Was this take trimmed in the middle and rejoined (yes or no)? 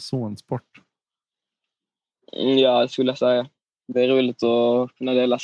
no